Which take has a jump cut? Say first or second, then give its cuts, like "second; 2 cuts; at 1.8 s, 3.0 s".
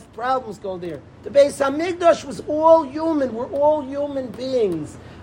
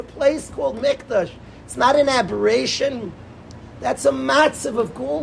first; 1 cut; at 1.1 s